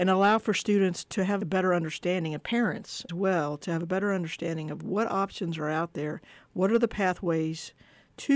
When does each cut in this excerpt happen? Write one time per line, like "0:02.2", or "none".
0:01.4
0:03.1